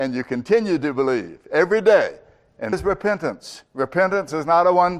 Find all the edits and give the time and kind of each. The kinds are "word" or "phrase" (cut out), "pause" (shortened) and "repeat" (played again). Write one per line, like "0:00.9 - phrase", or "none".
0:02.7 - word